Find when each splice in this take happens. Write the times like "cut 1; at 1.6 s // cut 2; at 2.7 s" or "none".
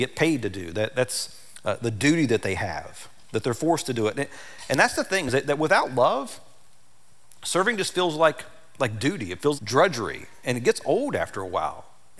cut 1; at 9.6 s

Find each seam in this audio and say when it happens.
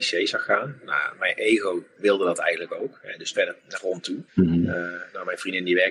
cut 1; at 3.3 s // cut 2; at 3.7 s // cut 3; at 4.3 s

